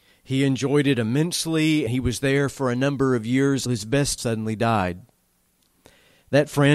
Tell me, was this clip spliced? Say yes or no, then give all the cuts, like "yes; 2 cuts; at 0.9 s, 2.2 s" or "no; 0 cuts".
yes; 3 cuts; at 1.9 s, 3.7 s, 4.2 s